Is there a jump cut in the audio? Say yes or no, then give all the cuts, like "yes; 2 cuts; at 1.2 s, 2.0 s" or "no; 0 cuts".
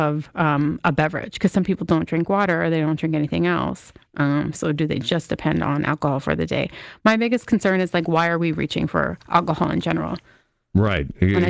no; 0 cuts